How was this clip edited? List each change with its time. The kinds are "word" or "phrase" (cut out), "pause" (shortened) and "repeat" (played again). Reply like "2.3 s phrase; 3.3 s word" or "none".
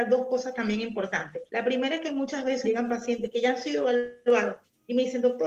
1.5 s pause; 2.6 s word